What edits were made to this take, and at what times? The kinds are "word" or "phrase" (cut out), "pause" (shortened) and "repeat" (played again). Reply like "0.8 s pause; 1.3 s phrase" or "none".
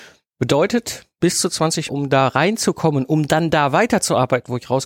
1.9 s phrase